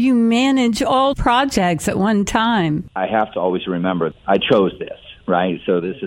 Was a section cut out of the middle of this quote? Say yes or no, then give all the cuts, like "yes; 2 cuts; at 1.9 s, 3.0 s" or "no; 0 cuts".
yes; 2 cuts; at 1.1 s, 3.3 s